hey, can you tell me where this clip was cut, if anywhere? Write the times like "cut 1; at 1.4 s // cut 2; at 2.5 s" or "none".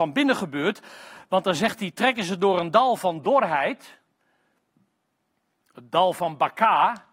none